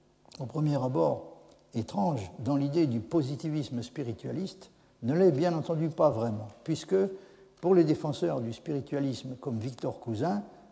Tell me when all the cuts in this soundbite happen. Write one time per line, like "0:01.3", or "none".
none